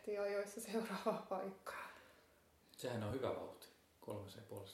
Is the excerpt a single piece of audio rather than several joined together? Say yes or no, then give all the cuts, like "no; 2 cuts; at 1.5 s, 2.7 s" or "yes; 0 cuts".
yes; 0 cuts